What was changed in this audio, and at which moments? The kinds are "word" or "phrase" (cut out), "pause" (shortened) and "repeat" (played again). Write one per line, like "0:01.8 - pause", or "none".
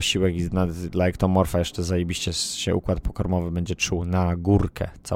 0:02.3 - word